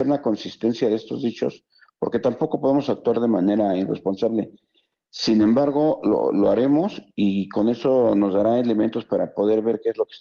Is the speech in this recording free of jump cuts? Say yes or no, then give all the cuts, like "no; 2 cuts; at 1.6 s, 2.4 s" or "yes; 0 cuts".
yes; 0 cuts